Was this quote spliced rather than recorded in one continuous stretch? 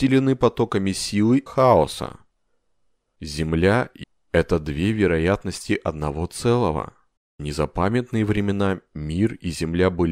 yes; 3 cuts; at 1.5 s, 4.0 s, 7.2 s

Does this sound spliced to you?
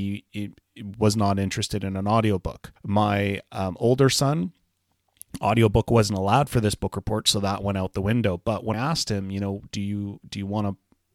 yes; 2 cuts; at 2.8 s, 8.7 s

